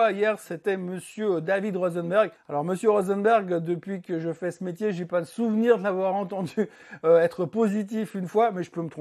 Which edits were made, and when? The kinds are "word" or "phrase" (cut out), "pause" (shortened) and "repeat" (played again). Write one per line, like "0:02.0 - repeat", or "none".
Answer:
none

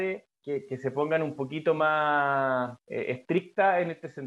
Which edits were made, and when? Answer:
none

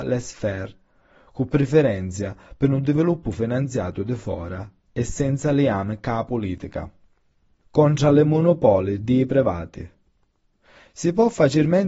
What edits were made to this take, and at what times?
none

